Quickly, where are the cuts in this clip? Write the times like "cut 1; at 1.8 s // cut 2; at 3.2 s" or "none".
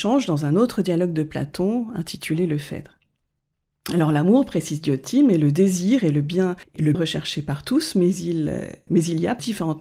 cut 1; at 6.9 s // cut 2; at 8.9 s